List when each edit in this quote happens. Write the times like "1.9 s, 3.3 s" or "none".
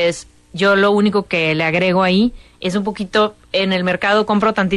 none

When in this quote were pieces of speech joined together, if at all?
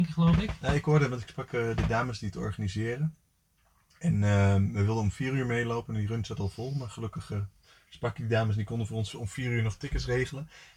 none

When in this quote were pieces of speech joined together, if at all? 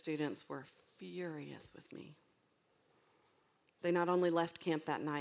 none

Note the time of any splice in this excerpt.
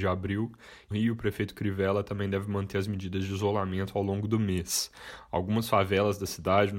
0.9 s

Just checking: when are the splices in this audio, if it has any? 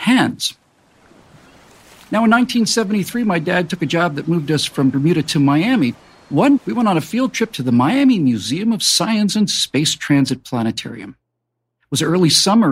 6.6 s

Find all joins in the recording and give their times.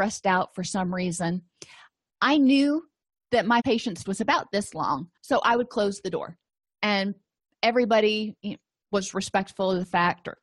3.6 s, 4.0 s, 5.2 s

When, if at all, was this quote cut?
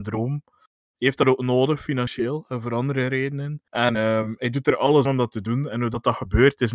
3.7 s, 5.0 s

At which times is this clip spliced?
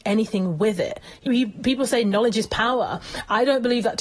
1.3 s

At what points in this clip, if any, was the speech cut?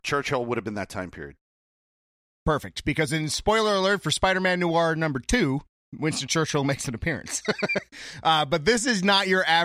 none

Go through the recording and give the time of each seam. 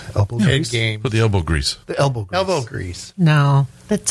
none

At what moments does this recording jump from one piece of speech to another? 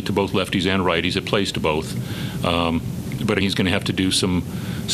3.4 s

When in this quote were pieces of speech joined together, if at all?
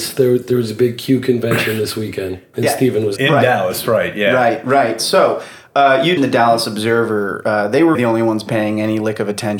2.5 s, 3.2 s, 6.2 s, 7.9 s

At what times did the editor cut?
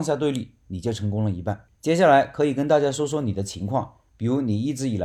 1.8 s

